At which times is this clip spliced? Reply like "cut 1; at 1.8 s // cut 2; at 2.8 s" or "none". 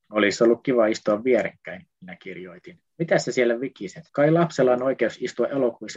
cut 1; at 1.9 s // cut 2; at 2.9 s // cut 3; at 4.1 s